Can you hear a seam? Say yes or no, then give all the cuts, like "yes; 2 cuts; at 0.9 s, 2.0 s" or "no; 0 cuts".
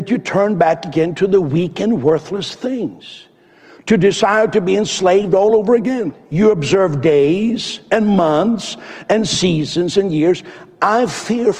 no; 0 cuts